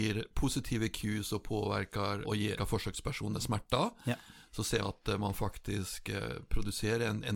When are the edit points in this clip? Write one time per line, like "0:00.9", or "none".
0:02.2
0:02.6
0:04.8